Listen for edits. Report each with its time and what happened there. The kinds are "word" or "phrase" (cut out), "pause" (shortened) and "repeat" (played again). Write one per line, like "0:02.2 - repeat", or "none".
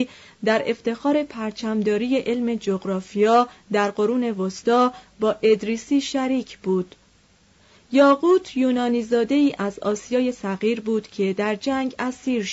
none